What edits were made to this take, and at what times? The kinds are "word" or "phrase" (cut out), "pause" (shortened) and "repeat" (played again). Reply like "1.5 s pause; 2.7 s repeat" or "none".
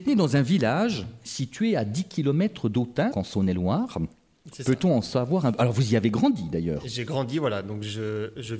3.1 s word